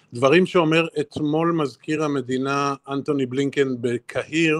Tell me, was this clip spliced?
no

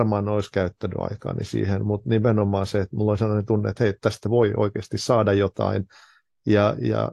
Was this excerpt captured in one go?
yes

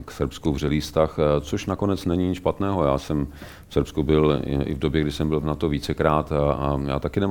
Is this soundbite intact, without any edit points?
yes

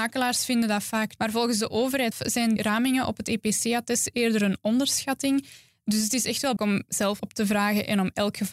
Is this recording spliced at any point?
yes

